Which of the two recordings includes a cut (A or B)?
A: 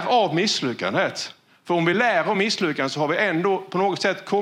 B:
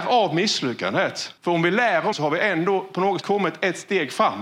B